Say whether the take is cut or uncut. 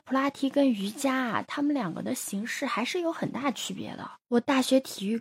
cut